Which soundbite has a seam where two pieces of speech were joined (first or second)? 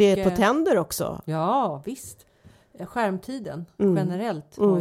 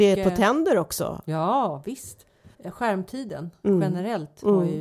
second